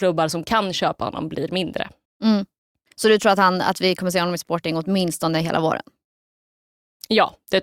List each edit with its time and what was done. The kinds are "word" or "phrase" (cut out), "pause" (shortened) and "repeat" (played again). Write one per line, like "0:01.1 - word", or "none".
0:02.0 - pause